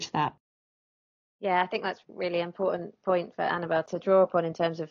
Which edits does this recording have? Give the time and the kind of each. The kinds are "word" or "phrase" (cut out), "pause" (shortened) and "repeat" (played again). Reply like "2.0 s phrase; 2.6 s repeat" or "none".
none